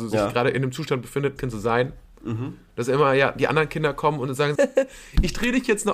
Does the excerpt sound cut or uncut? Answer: cut